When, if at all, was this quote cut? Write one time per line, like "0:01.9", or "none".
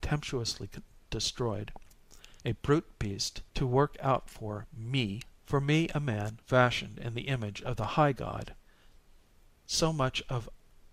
0:02.4
0:03.5
0:05.4
0:06.4